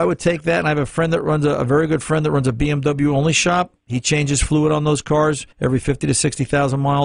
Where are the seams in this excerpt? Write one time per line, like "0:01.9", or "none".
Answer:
0:05.5

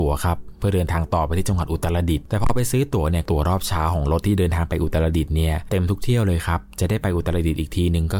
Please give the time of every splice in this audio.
none

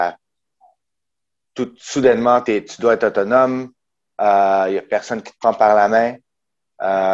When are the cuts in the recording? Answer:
0:02.4

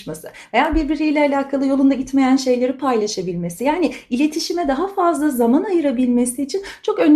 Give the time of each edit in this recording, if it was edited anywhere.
none

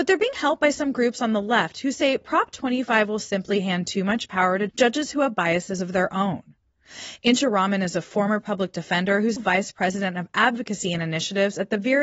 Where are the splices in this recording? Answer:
0:04.7
0:09.4

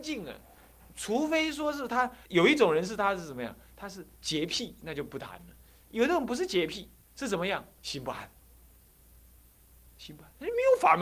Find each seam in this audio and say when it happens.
0:02.2

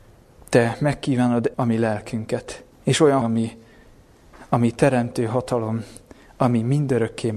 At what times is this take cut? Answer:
0:01.5
0:02.7
0:03.2

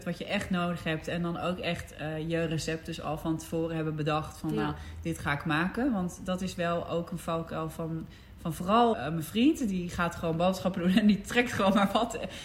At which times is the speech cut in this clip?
0:08.9

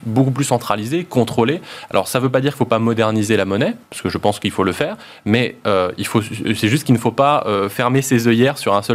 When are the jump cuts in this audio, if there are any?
0:03.8

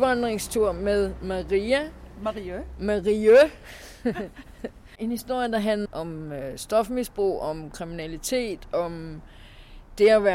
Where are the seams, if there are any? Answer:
0:05.8

